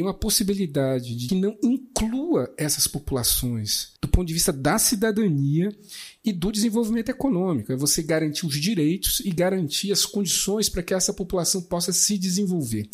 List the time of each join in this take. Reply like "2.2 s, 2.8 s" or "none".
1.3 s, 4.0 s